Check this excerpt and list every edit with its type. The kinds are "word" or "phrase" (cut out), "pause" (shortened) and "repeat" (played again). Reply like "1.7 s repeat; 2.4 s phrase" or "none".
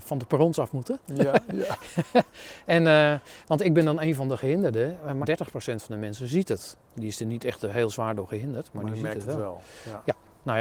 5.2 s word